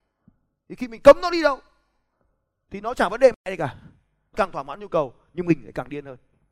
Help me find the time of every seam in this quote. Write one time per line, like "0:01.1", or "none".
0:04.3